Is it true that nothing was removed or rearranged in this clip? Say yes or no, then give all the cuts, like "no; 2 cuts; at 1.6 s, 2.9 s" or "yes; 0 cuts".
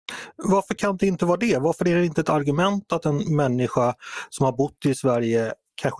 yes; 0 cuts